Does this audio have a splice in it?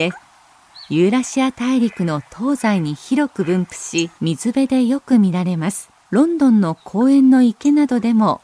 yes; 2 cuts; at 4.2 s, 6.0 s

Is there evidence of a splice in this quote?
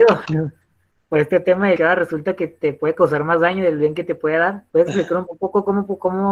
yes; 3 cuts; at 1.8 s, 4.7 s, 5.3 s

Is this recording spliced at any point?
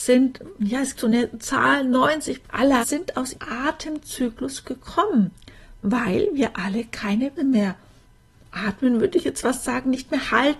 yes; 5 cuts; at 0.9 s, 2.4 s, 2.8 s, 3.3 s, 7.4 s

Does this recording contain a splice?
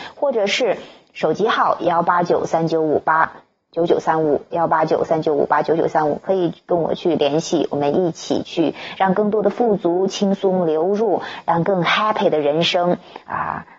no; 0 cuts

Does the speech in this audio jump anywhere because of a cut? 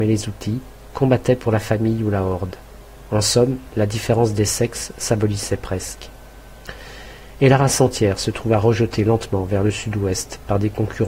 no; 0 cuts

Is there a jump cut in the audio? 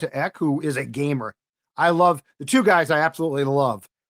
no; 0 cuts

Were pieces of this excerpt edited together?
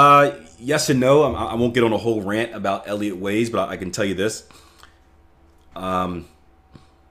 no; 0 cuts

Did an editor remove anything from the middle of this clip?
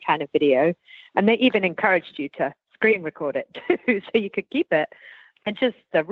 no; 0 cuts

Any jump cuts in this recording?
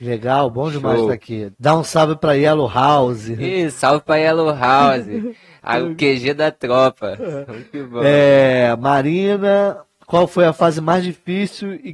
yes; 1 cut; at 1.5 s

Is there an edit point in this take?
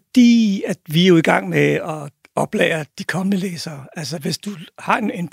no; 0 cuts

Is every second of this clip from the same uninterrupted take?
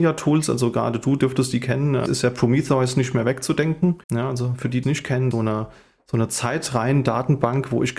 no; 4 cuts; at 2.1 s, 4.0 s, 4.8 s, 5.3 s

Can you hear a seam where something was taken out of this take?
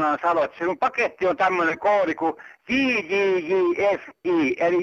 no; 0 cuts

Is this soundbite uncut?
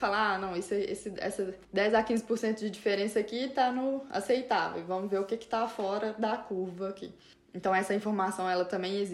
yes; 0 cuts

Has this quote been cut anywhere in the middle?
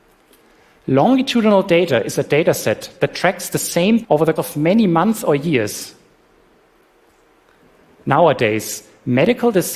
yes; 2 cuts; at 4.0 s, 4.4 s

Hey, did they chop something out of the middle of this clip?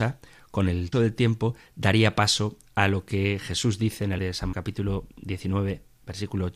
yes; 3 cuts; at 0.9 s, 4.2 s, 4.5 s

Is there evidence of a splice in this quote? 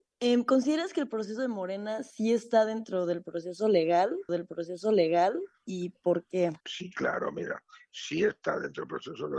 yes; 2 cuts; at 4.3 s, 6.6 s

